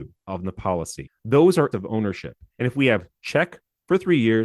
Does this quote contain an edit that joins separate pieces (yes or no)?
yes